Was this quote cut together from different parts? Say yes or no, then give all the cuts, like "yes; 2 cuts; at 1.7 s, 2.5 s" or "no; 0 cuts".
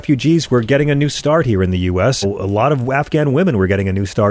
yes; 1 cut; at 2.2 s